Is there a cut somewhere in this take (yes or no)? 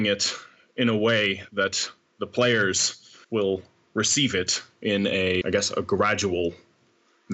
yes